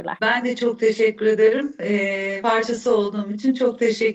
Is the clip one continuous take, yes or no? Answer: no